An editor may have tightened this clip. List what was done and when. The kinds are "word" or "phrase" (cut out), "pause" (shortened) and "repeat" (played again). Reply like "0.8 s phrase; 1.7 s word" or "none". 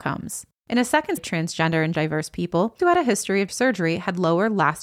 1.2 s word; 1.9 s word; 2.8 s word; 3.5 s word